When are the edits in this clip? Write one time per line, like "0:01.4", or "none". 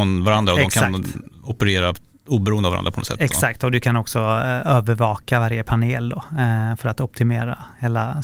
none